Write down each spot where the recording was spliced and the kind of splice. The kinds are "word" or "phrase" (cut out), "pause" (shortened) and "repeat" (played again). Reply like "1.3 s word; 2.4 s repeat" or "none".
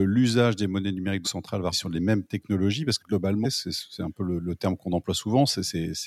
1.2 s word; 1.7 s word; 3.0 s word; 3.4 s word